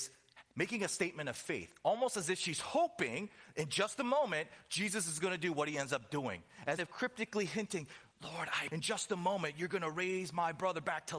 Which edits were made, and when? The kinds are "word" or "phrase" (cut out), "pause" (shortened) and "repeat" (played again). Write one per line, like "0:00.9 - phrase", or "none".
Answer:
0:06.8 - phrase
0:08.7 - word